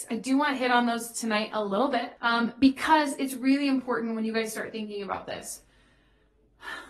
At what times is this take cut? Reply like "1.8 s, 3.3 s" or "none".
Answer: 2.2 s